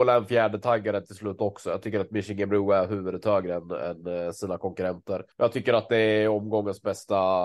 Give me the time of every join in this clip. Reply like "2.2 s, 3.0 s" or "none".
5.3 s